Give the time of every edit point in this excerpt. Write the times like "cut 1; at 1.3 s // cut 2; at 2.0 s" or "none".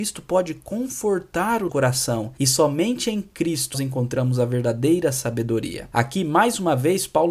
cut 1; at 1.7 s // cut 2; at 3.7 s